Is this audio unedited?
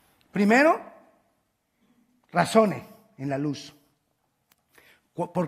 yes; 0 cuts

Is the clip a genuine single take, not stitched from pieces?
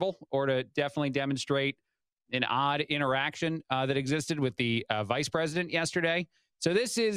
yes; 0 cuts

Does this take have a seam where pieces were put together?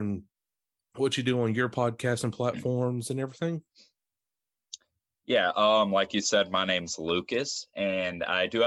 no; 0 cuts

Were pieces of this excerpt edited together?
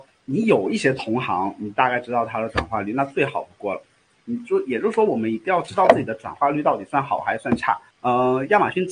no; 0 cuts

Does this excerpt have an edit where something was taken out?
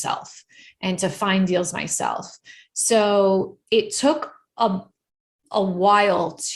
no; 0 cuts

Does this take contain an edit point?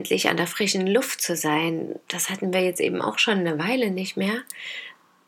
no; 0 cuts

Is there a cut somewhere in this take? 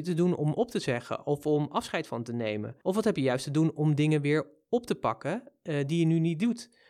yes; 1 cut; at 2.8 s

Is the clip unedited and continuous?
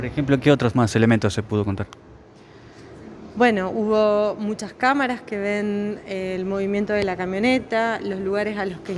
yes; 0 cuts

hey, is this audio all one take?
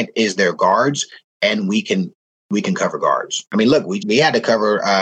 no; 1 cut; at 4.0 s

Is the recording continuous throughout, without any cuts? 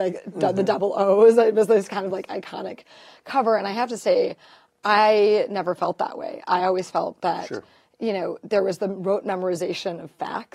yes; 0 cuts

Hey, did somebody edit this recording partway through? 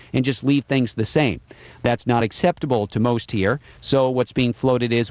no; 0 cuts

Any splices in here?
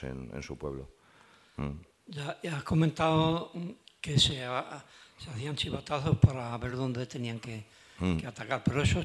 no; 0 cuts

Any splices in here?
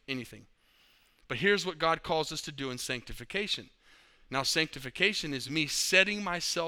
no; 0 cuts

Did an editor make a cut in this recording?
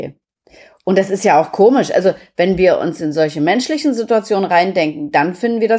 no; 0 cuts

